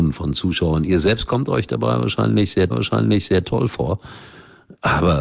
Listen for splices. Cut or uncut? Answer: cut